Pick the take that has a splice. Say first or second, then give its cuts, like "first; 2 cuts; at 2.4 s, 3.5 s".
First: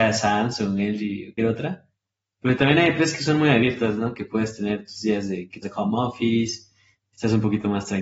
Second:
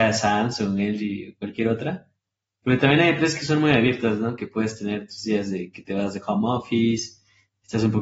first; 2 cuts; at 1.4 s, 5.6 s